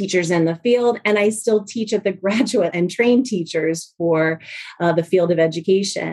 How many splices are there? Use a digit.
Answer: 1